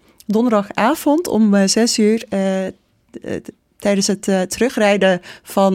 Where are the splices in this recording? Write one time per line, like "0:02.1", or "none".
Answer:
none